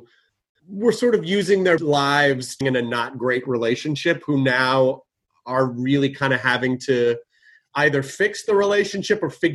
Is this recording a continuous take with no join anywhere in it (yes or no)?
no